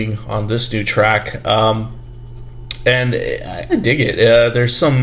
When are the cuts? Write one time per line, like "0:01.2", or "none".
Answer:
0:03.7

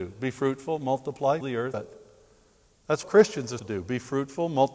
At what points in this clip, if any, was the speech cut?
0:01.4
0:01.7
0:03.0
0:03.6

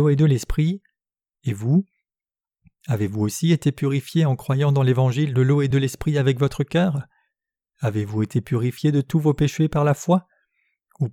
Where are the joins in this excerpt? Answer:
none

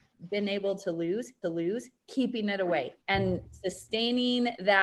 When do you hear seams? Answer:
0:01.4
0:03.0

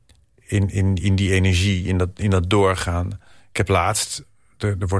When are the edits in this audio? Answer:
0:03.4

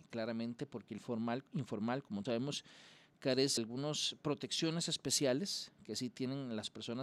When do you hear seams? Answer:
0:01.0
0:02.3
0:03.6

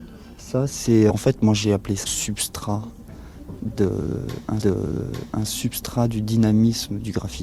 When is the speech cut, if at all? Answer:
0:01.1
0:02.1
0:04.6

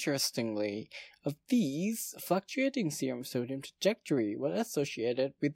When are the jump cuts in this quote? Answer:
none

